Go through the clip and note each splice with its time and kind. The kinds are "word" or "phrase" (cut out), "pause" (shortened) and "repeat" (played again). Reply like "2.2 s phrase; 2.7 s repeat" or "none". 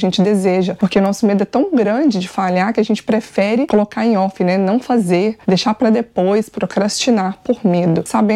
5.4 s pause

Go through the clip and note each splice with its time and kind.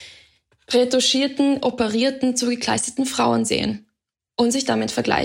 none

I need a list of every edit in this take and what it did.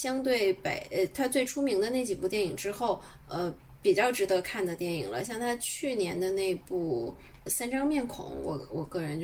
7.5 s word

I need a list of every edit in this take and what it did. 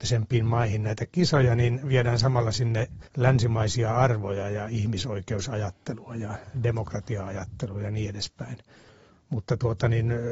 3.1 s pause

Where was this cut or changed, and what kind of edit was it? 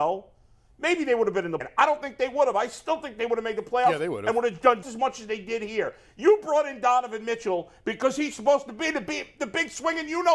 1.6 s word; 4.8 s word

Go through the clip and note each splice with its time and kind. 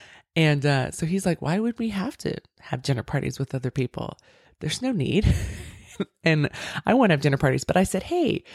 none

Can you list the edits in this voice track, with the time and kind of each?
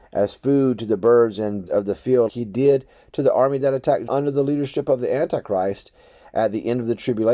1.7 s word; 2.3 s word; 4.1 s word

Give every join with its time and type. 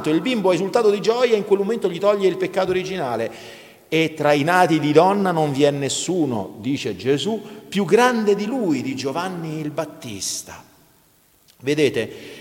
none

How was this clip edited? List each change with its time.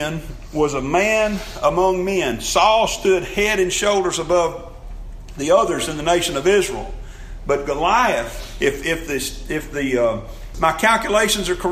none

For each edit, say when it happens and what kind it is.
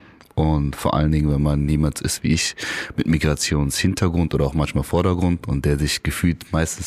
none

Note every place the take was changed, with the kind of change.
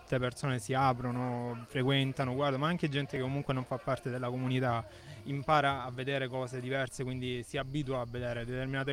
none

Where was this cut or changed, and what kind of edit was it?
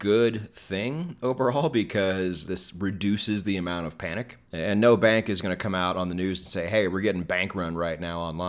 2.5 s word; 4.4 s pause

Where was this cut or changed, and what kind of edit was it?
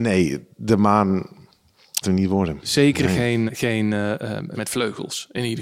2.0 s word; 3.5 s word; 4.5 s word

